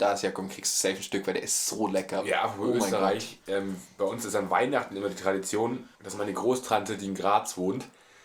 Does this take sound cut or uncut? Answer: cut